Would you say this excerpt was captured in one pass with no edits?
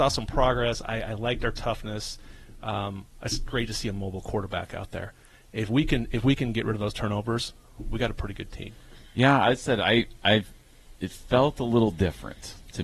yes; 0 cuts

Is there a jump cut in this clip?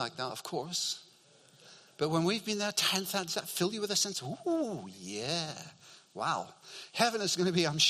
no; 0 cuts

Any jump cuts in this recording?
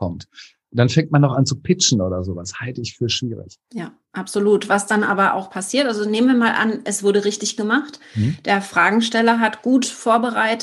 yes; 1 cut; at 3.6 s

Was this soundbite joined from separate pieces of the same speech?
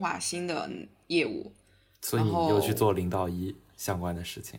no; 0 cuts

